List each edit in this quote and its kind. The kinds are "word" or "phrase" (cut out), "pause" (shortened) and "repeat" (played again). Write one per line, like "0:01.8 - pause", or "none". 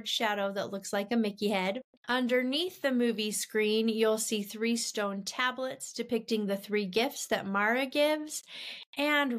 none